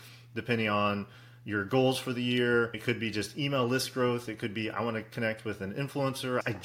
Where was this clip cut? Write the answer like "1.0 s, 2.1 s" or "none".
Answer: none